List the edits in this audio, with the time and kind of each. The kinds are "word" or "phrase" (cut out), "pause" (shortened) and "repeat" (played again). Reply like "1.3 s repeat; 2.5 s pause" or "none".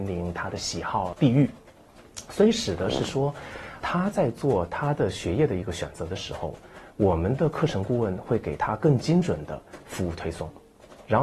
3.8 s word